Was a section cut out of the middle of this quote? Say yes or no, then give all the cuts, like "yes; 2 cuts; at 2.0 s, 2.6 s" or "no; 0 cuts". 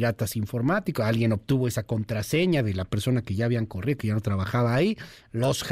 no; 0 cuts